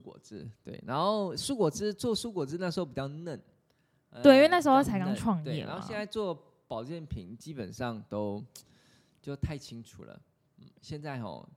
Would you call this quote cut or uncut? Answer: uncut